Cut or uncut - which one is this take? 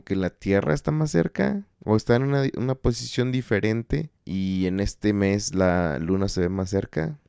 cut